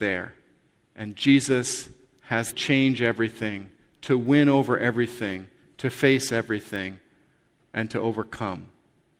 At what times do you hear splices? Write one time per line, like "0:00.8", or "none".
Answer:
0:02.5